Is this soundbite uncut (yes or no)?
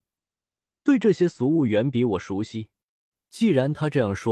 yes